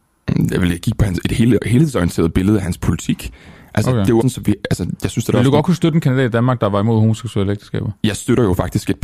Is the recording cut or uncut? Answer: cut